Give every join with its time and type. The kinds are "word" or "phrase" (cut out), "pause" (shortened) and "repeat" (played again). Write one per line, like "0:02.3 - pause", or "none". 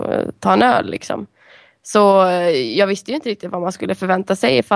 none